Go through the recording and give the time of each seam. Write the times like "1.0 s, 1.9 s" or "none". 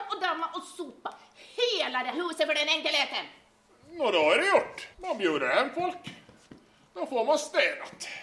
2.1 s, 3.7 s, 4.9 s